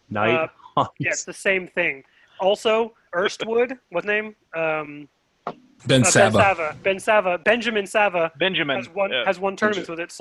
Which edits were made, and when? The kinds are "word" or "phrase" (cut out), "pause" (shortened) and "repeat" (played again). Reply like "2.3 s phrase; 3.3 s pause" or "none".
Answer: 1.2 s word; 3.1 s word; 4.0 s word; 5.8 s word

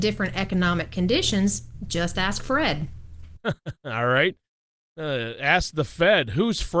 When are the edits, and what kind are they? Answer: none

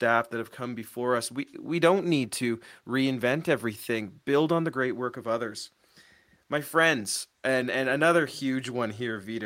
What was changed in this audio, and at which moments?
none

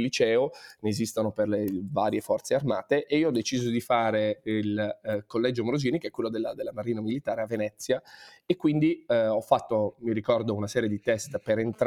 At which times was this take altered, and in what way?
none

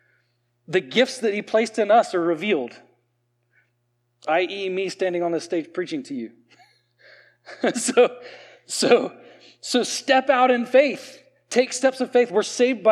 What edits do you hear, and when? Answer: none

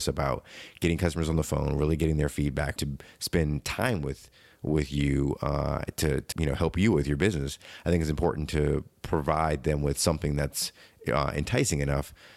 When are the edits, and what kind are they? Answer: 2.8 s phrase; 6.3 s word

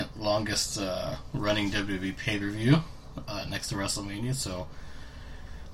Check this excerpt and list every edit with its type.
none

